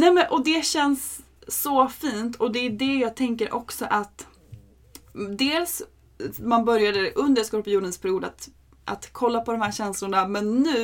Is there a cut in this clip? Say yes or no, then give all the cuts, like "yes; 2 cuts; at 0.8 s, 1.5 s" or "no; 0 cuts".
no; 0 cuts